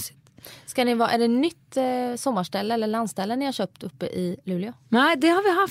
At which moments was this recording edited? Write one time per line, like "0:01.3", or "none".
none